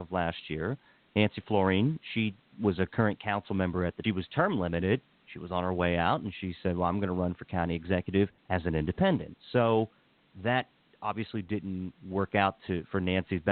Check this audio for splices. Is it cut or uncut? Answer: cut